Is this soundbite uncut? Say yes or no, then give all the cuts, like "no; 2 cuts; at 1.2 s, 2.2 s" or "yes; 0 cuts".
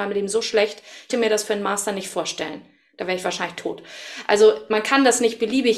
no; 1 cut; at 1.1 s